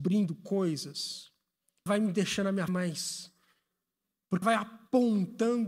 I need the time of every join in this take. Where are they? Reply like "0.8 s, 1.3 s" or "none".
1.9 s, 2.7 s, 4.4 s